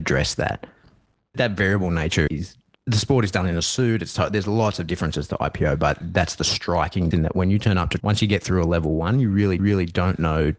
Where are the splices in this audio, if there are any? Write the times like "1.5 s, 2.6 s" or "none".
2.3 s, 2.7 s, 7.1 s, 8.0 s, 9.6 s